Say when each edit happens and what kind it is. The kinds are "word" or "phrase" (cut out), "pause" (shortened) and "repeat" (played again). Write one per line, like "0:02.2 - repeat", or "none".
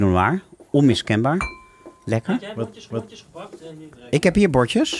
0:02.9 - repeat